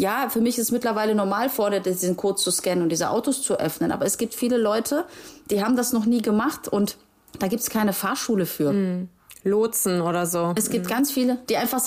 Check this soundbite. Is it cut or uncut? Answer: uncut